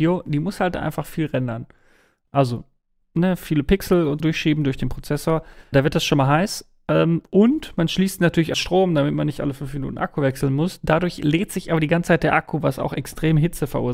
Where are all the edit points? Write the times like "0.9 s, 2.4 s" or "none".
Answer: 4.2 s, 5.7 s, 8.5 s